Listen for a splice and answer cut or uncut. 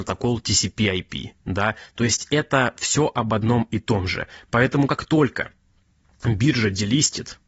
uncut